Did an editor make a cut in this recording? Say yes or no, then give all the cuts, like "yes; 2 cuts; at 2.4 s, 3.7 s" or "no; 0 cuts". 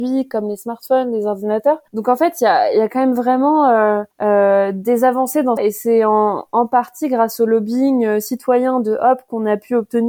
yes; 3 cuts; at 1.9 s, 4.1 s, 5.6 s